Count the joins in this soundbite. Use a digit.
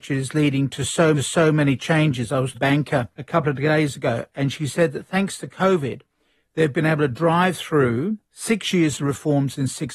4